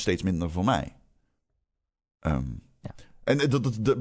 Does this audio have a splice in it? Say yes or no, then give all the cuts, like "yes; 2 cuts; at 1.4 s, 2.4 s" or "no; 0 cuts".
no; 0 cuts